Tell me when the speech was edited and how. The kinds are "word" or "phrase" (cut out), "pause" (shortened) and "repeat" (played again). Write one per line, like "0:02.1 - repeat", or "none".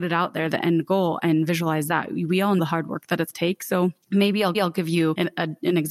0:02.6 - word
0:03.3 - phrase
0:04.0 - pause
0:04.5 - repeat